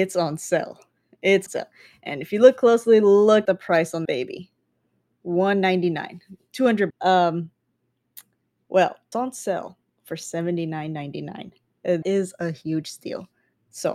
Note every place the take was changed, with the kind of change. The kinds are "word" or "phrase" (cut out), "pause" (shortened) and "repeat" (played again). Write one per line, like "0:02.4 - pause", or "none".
0:01.5 - word
0:03.5 - word
0:04.1 - word
0:06.9 - word
0:09.1 - word
0:12.0 - word